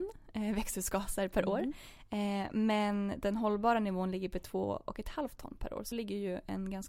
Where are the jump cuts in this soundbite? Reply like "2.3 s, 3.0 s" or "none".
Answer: 5.9 s

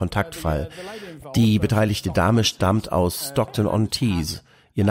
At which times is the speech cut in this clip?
none

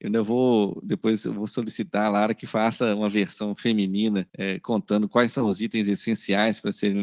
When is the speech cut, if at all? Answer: 4.3 s

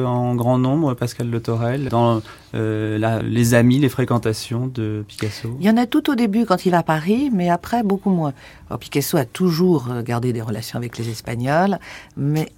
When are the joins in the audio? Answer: 1.9 s, 3.2 s, 6.7 s

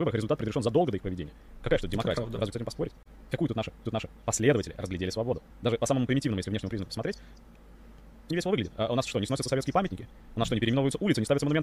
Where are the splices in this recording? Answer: 2.5 s, 3.8 s, 5.5 s, 8.3 s

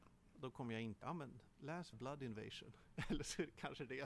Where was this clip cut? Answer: 1.0 s, 1.9 s

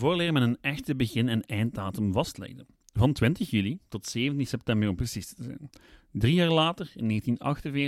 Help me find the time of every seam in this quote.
none

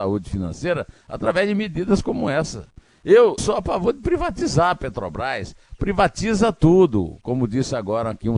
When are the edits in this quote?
3.4 s

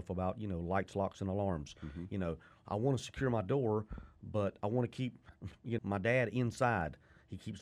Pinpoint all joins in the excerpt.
5.8 s

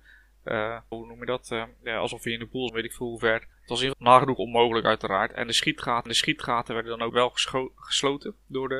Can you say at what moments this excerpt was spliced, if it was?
0.9 s, 2.7 s, 3.5 s, 3.9 s, 6.1 s, 7.1 s

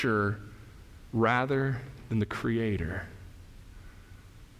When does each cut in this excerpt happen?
1.1 s

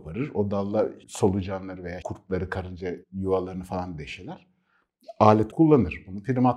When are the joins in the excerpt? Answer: 1.0 s, 2.0 s, 3.0 s, 5.5 s

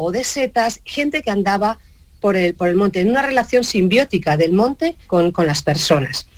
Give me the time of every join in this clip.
none

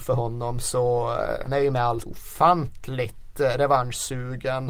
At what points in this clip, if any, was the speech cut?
1.4 s, 2.0 s

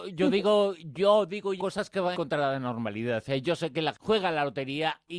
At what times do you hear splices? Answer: 1.6 s, 2.1 s, 3.9 s

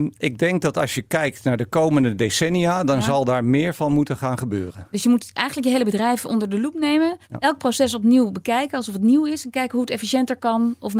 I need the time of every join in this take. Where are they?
7.2 s

